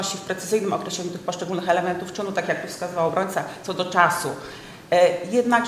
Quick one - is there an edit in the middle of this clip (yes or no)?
no